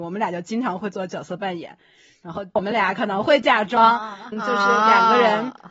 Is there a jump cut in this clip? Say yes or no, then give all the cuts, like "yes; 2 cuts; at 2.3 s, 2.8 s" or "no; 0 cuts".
yes; 2 cuts; at 2.6 s, 4.3 s